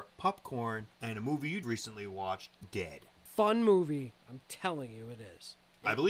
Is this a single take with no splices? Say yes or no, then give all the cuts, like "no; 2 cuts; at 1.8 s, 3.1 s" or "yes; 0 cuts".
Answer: no; 4 cuts; at 0.9 s, 1.6 s, 2.6 s, 4.2 s